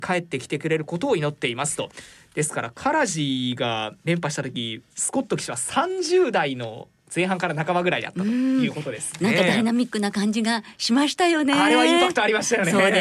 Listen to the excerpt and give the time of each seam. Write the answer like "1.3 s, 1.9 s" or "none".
4.0 s, 4.9 s